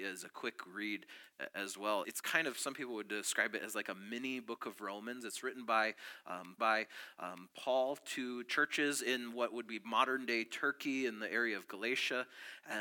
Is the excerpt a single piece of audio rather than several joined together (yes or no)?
no